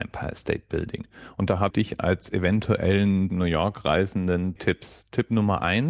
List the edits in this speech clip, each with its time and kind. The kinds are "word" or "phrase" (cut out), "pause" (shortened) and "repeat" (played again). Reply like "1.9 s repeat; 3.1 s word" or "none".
1.7 s phrase; 3.3 s word; 4.6 s word